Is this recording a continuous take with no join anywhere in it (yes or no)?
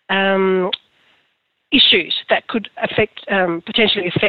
yes